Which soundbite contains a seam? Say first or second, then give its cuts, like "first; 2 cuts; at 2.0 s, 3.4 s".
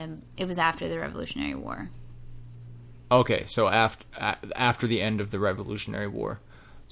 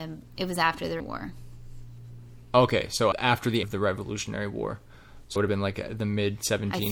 second; 4 cuts; at 1.0 s, 3.1 s, 3.6 s, 5.4 s